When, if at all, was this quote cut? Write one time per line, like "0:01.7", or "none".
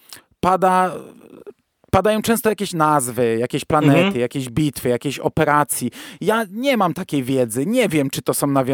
none